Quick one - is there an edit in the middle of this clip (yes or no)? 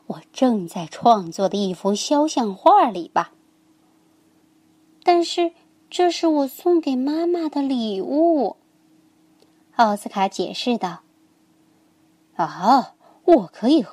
no